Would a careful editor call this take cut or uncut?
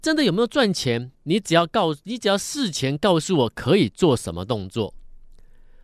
cut